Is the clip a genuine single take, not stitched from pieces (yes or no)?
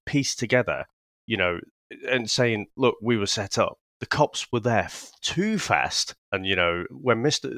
no